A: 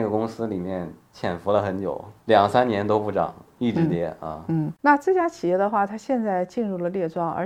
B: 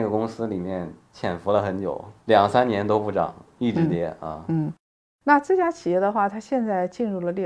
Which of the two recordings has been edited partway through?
A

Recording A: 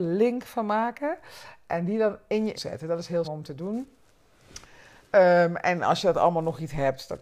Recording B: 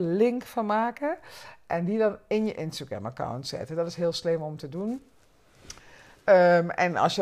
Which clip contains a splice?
A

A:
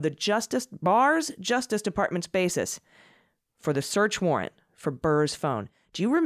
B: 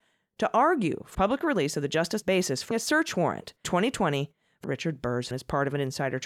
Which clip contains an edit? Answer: B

